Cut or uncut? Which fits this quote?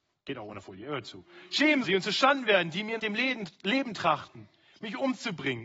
cut